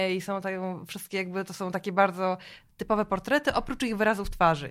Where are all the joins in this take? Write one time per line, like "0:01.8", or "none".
none